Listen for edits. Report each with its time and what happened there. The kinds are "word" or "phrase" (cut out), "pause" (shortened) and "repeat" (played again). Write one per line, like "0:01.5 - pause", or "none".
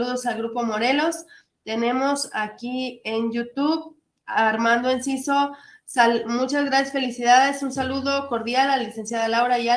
none